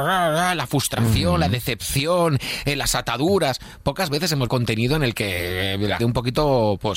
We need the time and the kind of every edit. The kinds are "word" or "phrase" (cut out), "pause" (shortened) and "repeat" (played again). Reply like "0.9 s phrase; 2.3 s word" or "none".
4.5 s word; 6.0 s phrase